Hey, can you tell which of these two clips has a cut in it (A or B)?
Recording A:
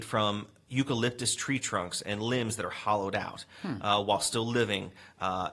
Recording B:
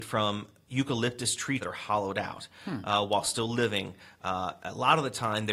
B